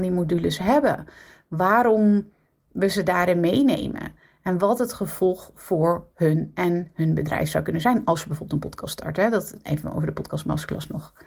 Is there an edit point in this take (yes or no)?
no